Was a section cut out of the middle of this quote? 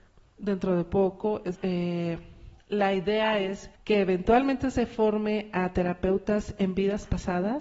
yes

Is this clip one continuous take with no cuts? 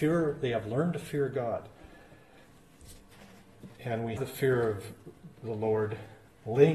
no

